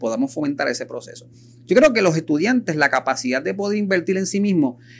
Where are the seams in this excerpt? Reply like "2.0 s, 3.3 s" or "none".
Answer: none